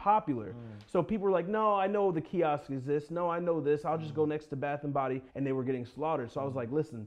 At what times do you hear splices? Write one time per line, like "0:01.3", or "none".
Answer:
0:05.3